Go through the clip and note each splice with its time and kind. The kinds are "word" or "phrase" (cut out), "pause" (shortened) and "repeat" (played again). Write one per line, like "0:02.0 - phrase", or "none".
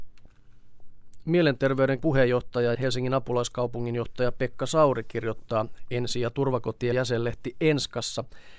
0:02.0 - word
0:02.7 - word
0:06.9 - word